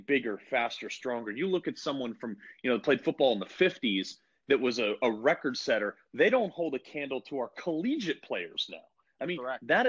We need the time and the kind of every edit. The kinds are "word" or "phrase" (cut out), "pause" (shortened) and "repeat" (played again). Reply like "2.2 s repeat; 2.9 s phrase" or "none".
none